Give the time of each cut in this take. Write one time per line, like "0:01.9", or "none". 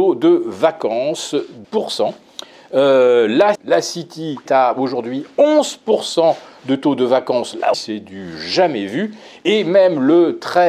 0:01.6
0:03.5
0:04.5
0:07.7